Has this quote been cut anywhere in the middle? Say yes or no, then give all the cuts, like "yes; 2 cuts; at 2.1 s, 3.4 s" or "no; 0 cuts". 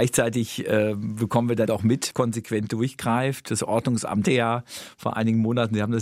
yes; 3 cuts; at 1.7 s, 2.1 s, 4.3 s